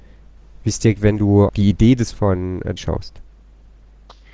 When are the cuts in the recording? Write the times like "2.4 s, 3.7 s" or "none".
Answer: 0.9 s, 1.5 s, 2.1 s, 2.8 s